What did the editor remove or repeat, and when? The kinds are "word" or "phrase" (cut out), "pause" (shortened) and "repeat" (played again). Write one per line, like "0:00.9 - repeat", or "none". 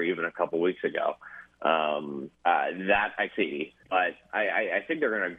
0:02.3 - pause
0:03.3 - word
0:03.8 - pause